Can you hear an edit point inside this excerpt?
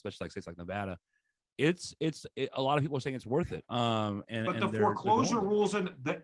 no; 0 cuts

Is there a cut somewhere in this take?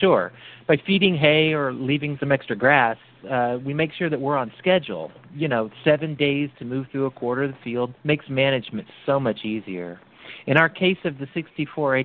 yes; 2 cuts; at 2.2 s, 8.0 s

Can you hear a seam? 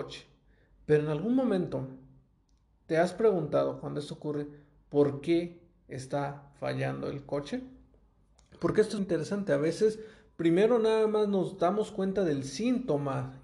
yes; 1 cut; at 9.0 s

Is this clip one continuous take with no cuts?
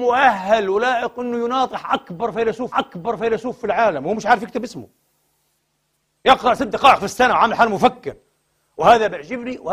no; 1 cut; at 2.7 s

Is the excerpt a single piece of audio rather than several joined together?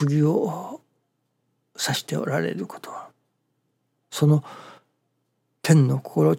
yes; 0 cuts

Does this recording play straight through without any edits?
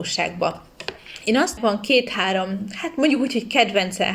no; 1 cut; at 1.6 s

